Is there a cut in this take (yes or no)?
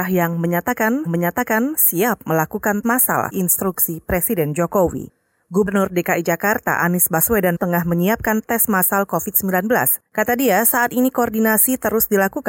yes